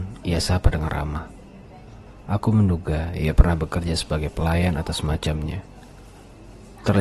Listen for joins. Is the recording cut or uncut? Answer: uncut